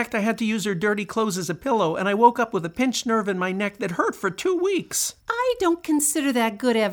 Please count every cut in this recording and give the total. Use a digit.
1